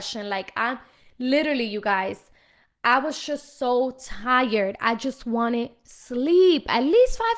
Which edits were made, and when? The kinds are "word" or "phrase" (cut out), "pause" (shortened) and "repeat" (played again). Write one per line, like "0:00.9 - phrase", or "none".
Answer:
none